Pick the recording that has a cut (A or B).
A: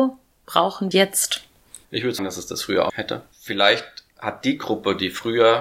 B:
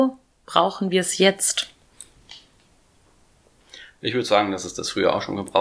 A